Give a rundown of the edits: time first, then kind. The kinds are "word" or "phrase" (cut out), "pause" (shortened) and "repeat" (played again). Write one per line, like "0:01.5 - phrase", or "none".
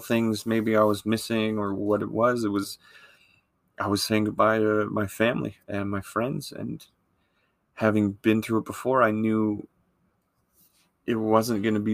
0:05.6 - pause